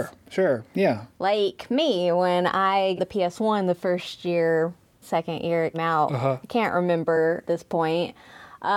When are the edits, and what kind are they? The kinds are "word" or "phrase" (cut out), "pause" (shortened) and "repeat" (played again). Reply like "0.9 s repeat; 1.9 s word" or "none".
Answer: 3.0 s word; 5.0 s word; 5.7 s word; 7.4 s word